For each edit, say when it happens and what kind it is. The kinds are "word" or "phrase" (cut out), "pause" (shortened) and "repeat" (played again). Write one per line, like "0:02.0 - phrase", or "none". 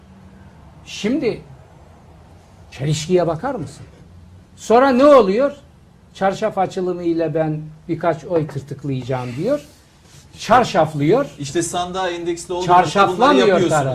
none

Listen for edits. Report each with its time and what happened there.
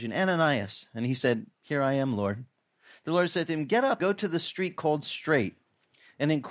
0:01.5 - pause
0:04.0 - word

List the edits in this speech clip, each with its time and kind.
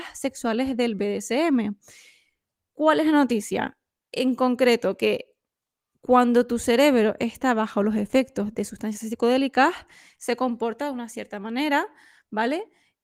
none

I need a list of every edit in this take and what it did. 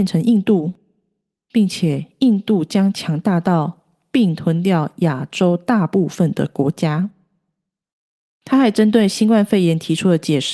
none

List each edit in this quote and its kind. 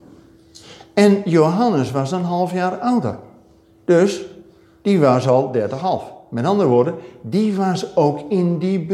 none

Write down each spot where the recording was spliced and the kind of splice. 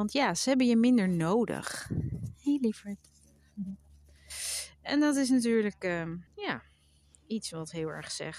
0:06.3 - pause

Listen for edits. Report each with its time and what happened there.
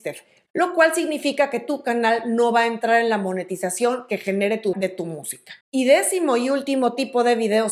0:04.7 - word
0:05.6 - pause

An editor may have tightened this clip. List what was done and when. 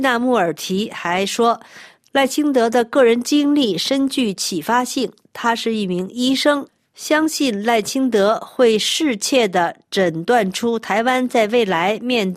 none

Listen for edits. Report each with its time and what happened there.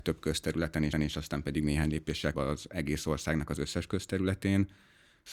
0:00.9 - repeat
0:01.6 - word
0:02.3 - word

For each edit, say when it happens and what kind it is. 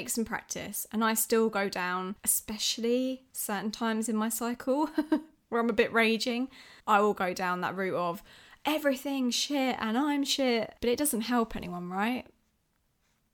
0:02.2 - pause
0:06.8 - pause
0:10.8 - pause

